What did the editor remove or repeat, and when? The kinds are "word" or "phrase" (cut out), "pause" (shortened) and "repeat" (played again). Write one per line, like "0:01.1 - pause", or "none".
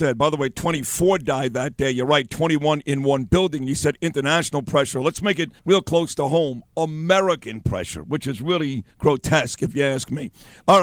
0:05.6 - pause
0:08.9 - pause